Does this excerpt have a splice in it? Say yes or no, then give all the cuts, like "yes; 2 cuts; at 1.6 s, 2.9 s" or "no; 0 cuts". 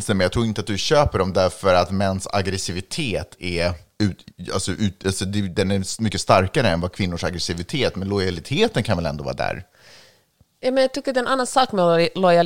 no; 0 cuts